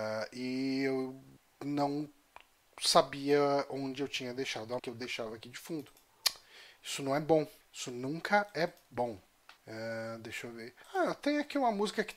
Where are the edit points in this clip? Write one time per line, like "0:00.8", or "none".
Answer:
0:04.8
0:07.6
0:09.6
0:10.8